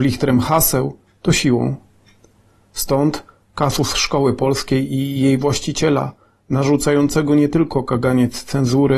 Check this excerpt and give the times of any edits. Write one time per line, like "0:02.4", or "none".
none